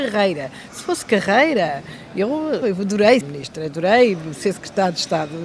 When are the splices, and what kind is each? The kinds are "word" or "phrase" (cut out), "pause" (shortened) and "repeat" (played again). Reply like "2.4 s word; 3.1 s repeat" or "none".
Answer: 2.6 s word; 3.2 s word